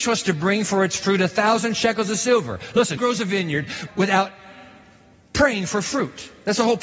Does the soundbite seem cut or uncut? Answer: cut